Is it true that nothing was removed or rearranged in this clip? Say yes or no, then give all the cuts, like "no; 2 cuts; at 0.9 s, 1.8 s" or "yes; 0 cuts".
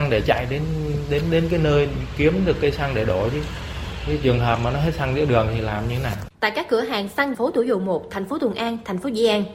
no; 2 cuts; at 6.3 s, 7.3 s